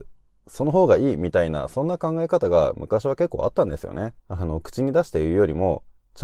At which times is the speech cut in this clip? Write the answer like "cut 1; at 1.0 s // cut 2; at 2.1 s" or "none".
cut 1; at 4.2 s